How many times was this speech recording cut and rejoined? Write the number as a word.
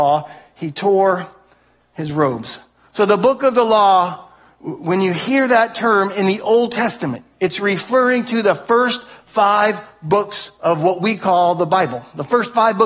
zero